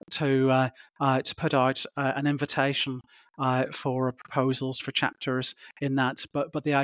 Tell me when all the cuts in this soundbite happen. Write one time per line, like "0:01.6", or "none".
none

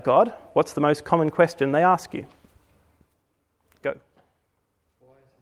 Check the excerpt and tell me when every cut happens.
none

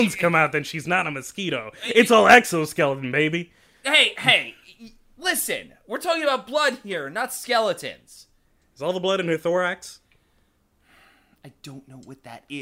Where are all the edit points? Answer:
none

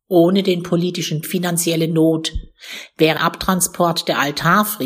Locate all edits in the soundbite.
0:01.2
0:03.2

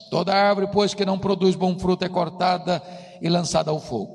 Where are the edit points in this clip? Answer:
none

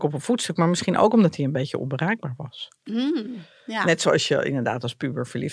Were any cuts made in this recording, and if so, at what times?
none

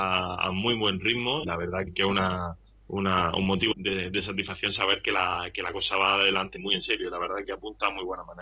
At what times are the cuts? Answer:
0:01.4
0:01.9
0:03.7
0:06.6
0:07.4

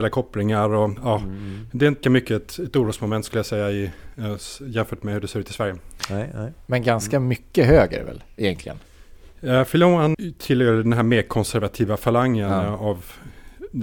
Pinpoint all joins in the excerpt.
0:02.0
0:10.1

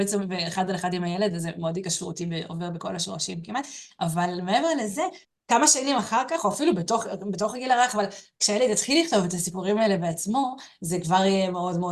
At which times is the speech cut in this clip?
0:05.2

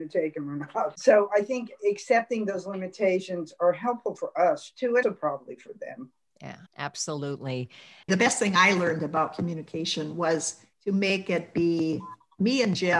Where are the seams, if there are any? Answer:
0:05.0
0:06.7
0:10.7

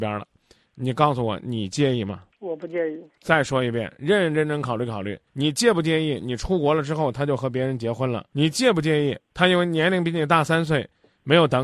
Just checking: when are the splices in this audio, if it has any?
0:05.3

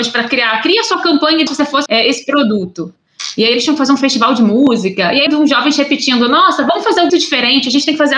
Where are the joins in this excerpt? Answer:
0:01.5
0:01.9
0:05.3
0:07.1

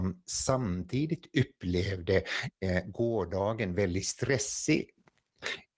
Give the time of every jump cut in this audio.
none

